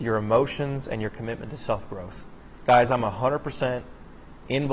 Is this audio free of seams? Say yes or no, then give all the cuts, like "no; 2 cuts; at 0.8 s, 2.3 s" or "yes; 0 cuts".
yes; 0 cuts